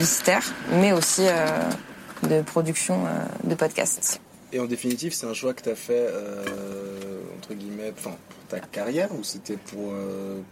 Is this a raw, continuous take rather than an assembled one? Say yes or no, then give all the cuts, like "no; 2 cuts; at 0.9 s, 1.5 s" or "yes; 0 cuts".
yes; 0 cuts